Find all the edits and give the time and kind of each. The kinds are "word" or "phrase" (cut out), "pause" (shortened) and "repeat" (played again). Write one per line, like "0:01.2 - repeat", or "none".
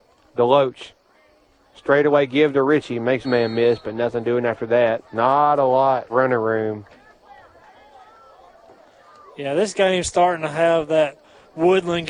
0:03.2 - word
0:05.1 - pause
0:06.1 - word